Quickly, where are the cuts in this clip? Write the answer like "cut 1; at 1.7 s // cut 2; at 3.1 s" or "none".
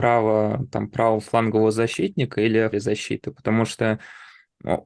cut 1; at 2.7 s